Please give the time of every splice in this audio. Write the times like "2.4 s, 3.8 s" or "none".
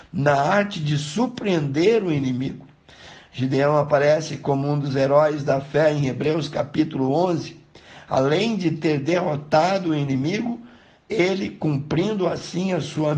none